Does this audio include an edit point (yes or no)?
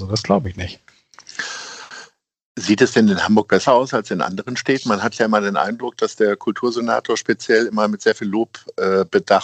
no